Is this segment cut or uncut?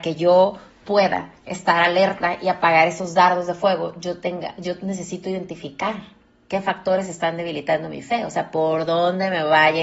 uncut